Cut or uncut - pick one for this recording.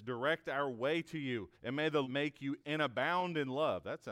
cut